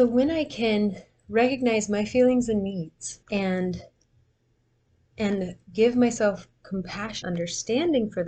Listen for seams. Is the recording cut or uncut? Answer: cut